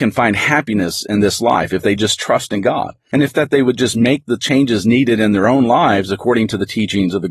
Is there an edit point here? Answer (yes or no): no